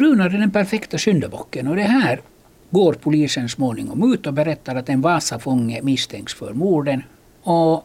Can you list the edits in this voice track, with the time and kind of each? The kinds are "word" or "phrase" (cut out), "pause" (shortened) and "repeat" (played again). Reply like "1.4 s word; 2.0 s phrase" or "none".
none